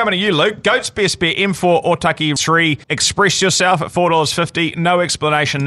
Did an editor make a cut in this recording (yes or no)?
yes